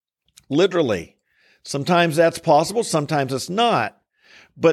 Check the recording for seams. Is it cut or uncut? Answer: uncut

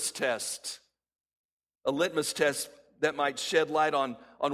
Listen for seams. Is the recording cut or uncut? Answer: uncut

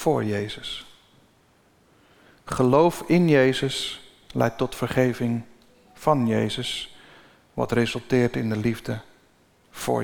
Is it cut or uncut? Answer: uncut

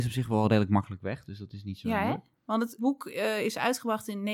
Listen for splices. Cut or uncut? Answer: cut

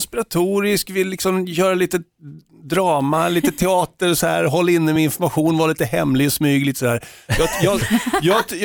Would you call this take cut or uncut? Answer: uncut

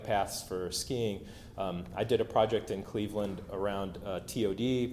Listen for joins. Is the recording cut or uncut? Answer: uncut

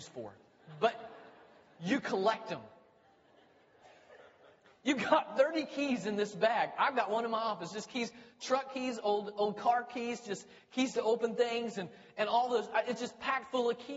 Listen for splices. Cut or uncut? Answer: uncut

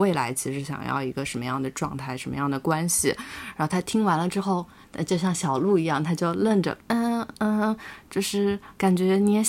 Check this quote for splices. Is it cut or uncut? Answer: cut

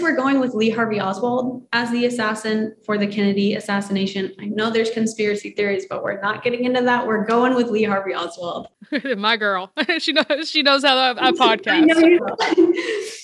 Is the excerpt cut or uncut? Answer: cut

